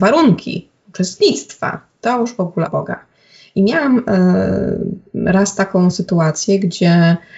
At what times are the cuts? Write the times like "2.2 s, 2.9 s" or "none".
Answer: 2.7 s